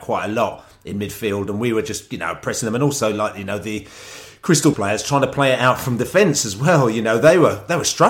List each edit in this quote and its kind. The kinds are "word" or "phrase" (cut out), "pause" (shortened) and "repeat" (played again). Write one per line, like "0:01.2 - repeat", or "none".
0:04.7 - word